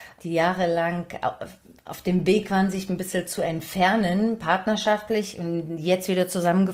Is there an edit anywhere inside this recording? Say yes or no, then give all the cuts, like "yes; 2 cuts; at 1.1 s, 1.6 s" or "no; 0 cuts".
no; 0 cuts